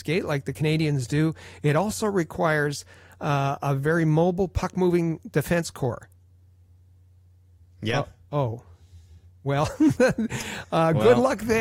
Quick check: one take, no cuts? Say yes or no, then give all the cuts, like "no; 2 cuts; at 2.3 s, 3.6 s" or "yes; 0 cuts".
yes; 0 cuts